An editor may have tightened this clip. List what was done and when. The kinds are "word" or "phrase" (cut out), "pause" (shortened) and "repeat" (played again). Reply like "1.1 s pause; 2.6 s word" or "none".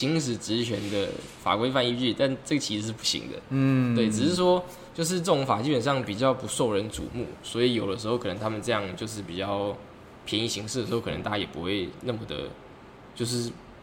none